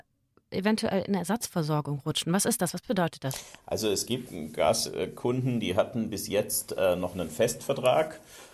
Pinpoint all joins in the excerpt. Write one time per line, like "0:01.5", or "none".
none